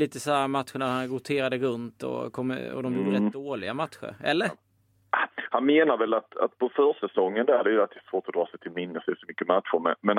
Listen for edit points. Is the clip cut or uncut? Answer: uncut